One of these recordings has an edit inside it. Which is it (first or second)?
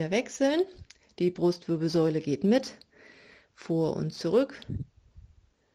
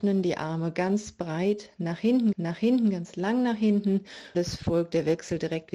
second